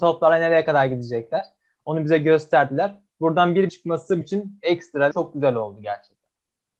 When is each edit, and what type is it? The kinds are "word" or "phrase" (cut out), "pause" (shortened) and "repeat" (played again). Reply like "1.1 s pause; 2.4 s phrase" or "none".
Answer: 3.7 s word; 4.2 s word; 5.1 s word